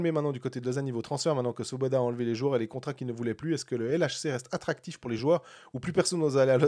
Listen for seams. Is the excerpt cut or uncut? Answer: uncut